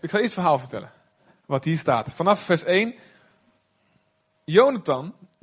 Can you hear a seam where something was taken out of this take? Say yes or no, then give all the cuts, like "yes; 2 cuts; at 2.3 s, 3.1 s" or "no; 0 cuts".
no; 0 cuts